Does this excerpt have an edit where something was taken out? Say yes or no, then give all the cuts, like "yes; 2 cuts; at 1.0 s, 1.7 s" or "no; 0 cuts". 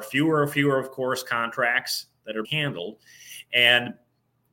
yes; 1 cut; at 2.4 s